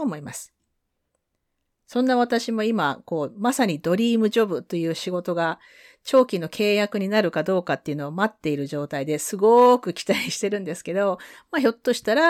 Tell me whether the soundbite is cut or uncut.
uncut